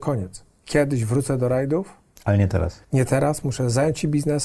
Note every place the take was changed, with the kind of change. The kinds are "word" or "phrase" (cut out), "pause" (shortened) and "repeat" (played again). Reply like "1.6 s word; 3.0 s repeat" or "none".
2.8 s pause